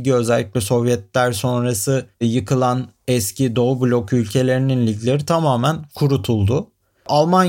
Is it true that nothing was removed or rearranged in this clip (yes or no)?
no